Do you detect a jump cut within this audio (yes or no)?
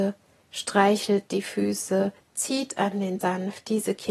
yes